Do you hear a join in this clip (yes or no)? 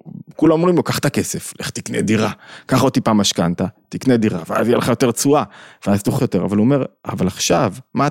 yes